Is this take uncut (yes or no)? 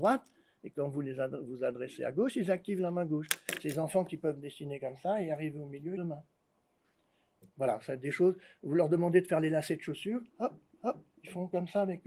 no